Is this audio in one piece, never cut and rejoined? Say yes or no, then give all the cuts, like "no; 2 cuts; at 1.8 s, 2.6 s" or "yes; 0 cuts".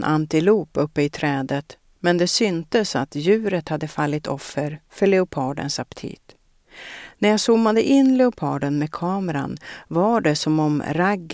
yes; 0 cuts